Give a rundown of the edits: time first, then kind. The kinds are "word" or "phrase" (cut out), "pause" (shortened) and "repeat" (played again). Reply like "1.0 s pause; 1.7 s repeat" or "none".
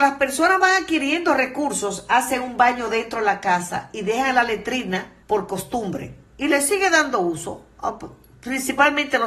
5.2 s pause